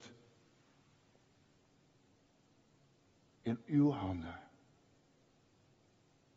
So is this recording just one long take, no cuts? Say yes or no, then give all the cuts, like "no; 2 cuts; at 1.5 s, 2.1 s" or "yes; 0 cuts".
yes; 0 cuts